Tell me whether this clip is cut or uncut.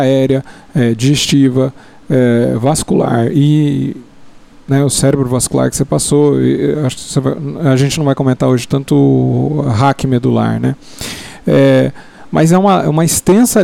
uncut